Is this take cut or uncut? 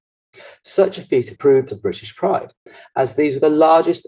cut